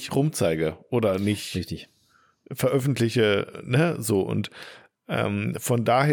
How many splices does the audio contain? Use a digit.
0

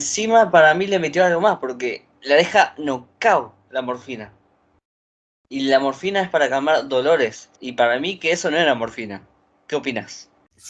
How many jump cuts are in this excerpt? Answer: 1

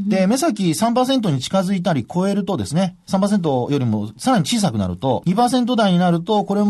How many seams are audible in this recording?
1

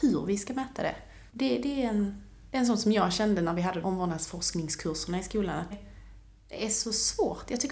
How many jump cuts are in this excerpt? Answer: 3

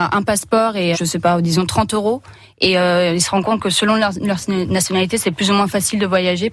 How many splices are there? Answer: 1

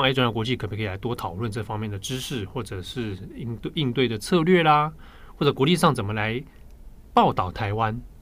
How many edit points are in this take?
0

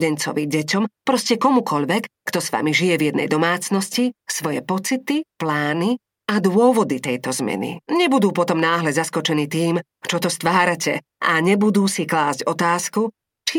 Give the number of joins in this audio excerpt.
3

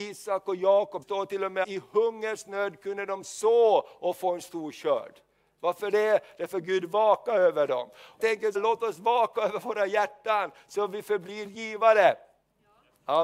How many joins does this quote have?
4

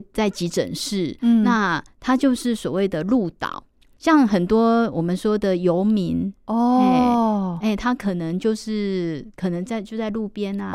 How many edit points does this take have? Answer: 0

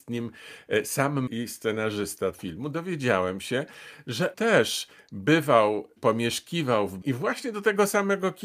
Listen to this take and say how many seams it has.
5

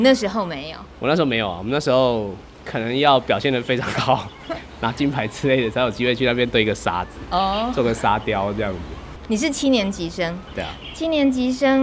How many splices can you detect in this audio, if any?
1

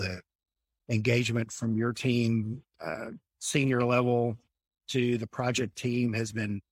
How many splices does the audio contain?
0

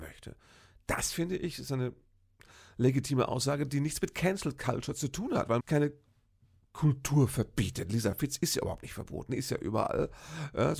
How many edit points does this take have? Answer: 1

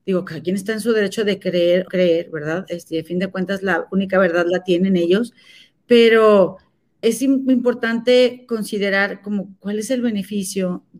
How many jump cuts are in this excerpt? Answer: 2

